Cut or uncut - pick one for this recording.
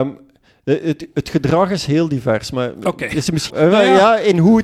cut